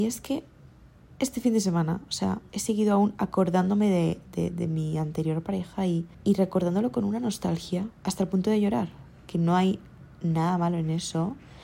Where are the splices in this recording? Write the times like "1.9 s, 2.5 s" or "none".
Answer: 2.5 s, 6.1 s, 7.9 s